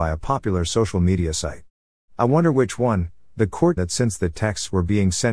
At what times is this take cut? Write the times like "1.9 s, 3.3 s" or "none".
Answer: 3.8 s